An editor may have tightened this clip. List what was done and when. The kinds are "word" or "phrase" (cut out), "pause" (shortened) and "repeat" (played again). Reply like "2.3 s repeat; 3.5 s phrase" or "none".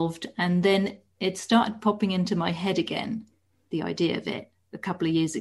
none